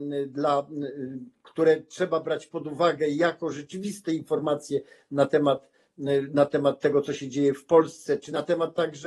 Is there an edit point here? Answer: no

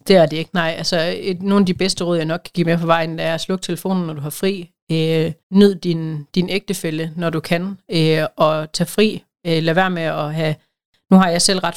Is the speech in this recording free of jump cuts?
no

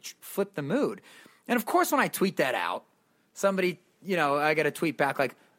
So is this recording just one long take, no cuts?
yes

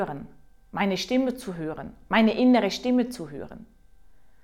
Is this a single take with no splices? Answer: yes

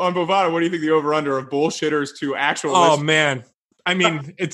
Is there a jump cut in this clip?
no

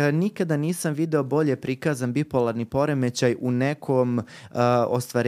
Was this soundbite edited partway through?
no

